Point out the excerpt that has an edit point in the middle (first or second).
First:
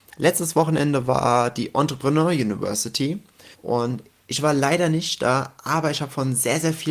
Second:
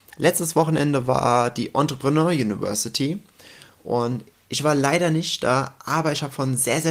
first